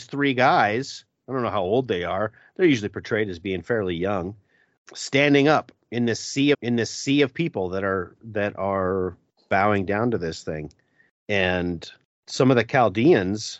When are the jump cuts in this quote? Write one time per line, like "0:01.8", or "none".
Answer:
0:06.5